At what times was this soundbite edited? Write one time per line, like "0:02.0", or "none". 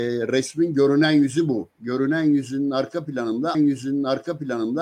0:01.7
0:03.5